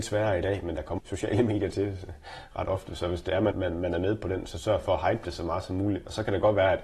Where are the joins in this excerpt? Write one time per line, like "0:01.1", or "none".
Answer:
0:01.0
0:03.5